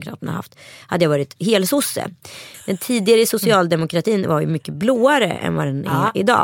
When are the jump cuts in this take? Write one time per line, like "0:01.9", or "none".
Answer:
none